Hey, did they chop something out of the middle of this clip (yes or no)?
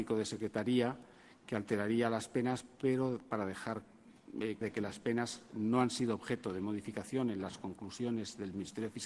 yes